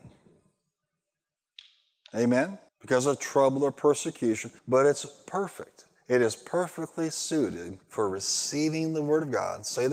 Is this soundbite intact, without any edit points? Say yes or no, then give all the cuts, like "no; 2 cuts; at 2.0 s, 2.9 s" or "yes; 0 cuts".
no; 3 cuts; at 2.7 s, 4.6 s, 7.8 s